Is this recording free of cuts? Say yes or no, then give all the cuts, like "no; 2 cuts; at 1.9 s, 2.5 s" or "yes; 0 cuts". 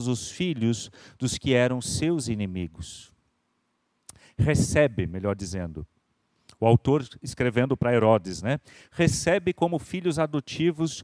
yes; 0 cuts